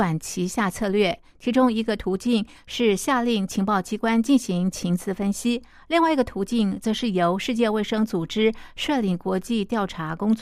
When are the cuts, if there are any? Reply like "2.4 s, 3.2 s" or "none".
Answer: none